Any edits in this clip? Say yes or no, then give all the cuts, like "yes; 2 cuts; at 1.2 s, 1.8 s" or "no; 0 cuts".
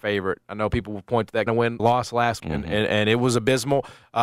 yes; 3 cuts; at 1.5 s, 1.8 s, 2.4 s